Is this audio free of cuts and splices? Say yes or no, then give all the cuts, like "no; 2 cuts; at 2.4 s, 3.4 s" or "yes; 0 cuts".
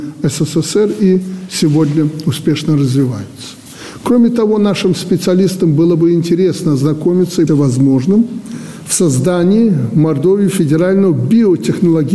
no; 1 cut; at 7.5 s